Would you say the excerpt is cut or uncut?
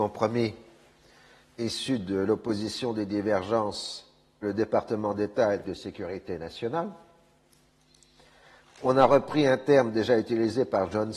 cut